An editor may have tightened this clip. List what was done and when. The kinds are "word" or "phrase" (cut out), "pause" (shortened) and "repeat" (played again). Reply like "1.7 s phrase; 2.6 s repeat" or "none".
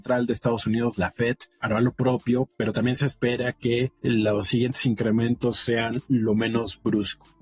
none